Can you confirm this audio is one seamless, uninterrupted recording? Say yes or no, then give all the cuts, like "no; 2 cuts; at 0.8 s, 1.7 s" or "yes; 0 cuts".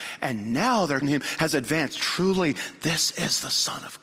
no; 1 cut; at 1.0 s